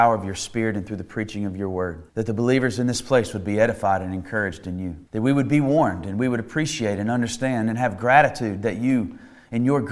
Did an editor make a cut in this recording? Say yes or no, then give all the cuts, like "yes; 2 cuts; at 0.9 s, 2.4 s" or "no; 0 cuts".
yes; 2 cuts; at 2.1 s, 5.1 s